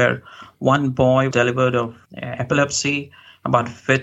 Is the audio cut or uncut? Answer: cut